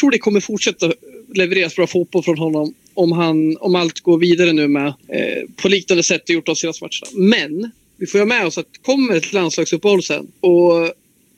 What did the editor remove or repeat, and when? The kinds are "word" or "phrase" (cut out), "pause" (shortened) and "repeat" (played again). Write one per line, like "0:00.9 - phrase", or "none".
0:05.0 - pause
0:10.3 - pause